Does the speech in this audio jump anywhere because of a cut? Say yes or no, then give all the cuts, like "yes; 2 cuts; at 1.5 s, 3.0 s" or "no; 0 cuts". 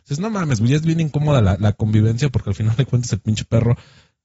no; 0 cuts